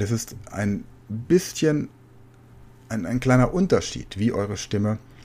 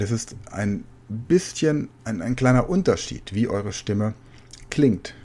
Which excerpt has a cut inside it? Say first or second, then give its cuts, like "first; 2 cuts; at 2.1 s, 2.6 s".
second; 1 cut; at 2.0 s